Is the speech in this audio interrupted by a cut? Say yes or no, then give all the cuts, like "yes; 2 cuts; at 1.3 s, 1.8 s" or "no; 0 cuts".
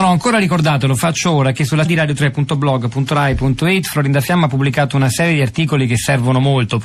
yes; 1 cut; at 1.8 s